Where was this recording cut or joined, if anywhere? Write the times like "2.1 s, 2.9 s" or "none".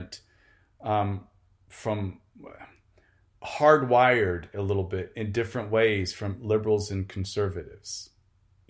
3.3 s